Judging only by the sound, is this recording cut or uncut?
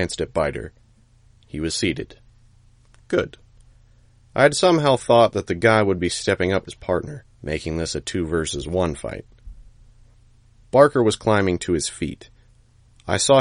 cut